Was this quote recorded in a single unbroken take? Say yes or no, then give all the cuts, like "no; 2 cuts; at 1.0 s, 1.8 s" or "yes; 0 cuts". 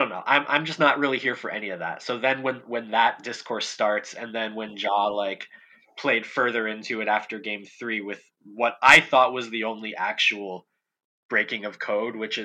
yes; 0 cuts